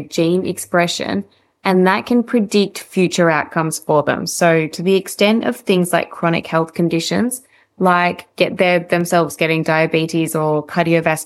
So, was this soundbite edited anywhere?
no; 0 cuts

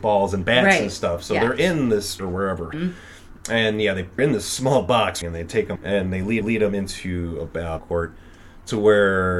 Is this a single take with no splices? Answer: no; 7 cuts; at 2.2 s, 2.7 s, 4.2 s, 5.2 s, 5.8 s, 6.4 s, 7.8 s

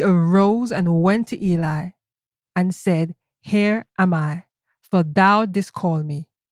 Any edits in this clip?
no; 0 cuts

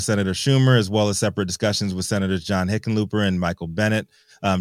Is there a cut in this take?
no; 0 cuts

